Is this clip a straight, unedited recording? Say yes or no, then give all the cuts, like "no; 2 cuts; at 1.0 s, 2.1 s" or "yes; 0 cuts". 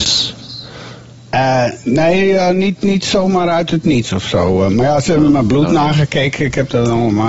yes; 0 cuts